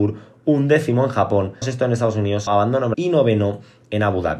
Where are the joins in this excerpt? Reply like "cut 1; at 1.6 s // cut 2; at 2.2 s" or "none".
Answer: cut 1; at 1.6 s // cut 2; at 2.5 s // cut 3; at 2.9 s